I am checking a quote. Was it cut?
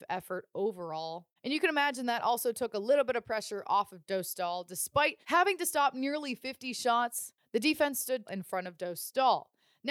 yes; 3 cuts; at 1.4 s, 5.2 s, 8.3 s

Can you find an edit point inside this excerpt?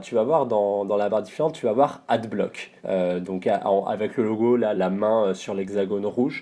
yes; 2 cuts; at 2.8 s, 4.7 s

